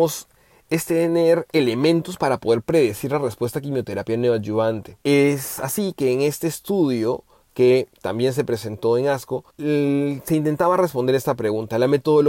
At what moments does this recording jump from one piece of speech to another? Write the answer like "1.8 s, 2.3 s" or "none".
5.0 s, 9.5 s